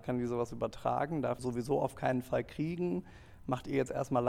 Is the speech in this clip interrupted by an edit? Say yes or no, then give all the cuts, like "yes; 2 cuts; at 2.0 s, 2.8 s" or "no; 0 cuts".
yes; 1 cut; at 1.4 s